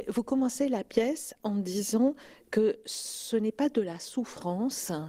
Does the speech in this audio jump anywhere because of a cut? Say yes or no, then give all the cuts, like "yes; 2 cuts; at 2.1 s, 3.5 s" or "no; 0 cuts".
no; 0 cuts